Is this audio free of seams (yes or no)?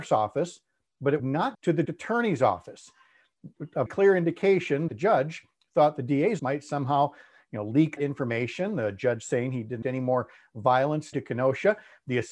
no